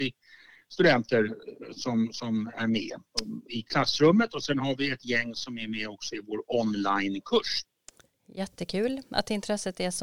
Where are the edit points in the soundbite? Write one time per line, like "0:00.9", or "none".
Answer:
none